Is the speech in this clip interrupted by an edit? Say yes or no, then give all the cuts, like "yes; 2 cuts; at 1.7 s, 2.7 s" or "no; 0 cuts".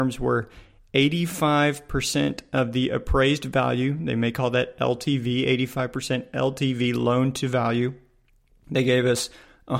no; 0 cuts